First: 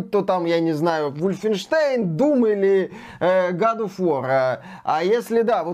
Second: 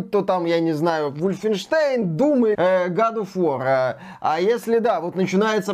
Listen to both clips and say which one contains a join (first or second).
second